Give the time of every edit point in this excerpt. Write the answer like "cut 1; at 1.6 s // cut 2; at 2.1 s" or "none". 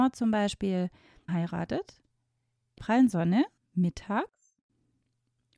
cut 1; at 1.3 s // cut 2; at 2.8 s // cut 3; at 3.6 s